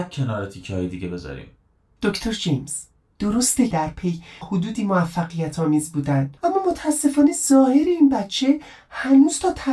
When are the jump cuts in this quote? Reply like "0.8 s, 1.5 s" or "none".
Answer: 3.7 s, 4.4 s, 6.4 s